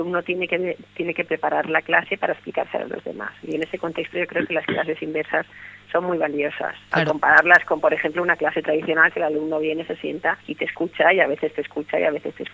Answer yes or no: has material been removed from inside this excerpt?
yes